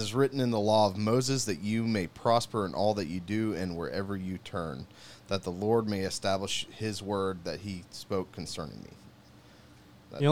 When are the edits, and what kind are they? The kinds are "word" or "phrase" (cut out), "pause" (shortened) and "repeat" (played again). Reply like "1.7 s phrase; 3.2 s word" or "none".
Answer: none